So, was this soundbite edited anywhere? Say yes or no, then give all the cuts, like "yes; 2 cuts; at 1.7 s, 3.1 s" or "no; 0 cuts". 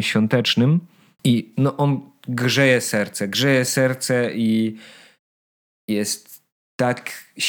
no; 0 cuts